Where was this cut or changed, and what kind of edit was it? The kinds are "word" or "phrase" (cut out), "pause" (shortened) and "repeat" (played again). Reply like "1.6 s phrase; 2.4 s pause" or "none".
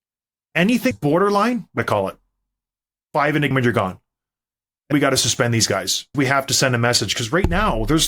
0.9 s word; 1.8 s word; 3.5 s word; 4.9 s word; 6.1 s word